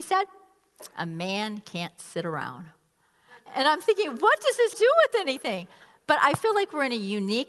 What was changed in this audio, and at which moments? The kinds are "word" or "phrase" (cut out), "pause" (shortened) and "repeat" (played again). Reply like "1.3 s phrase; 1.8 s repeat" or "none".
4.7 s phrase